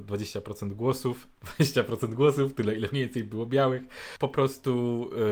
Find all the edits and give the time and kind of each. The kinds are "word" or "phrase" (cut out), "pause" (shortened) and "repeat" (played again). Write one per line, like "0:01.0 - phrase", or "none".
0:01.3 - pause